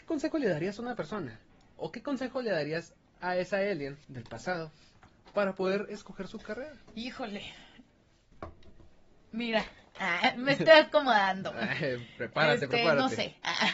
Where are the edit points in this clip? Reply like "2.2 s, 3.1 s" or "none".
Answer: 1.5 s, 4.0 s